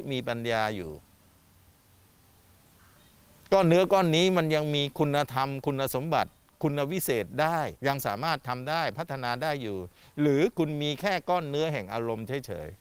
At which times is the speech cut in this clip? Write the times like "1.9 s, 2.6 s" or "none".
7.8 s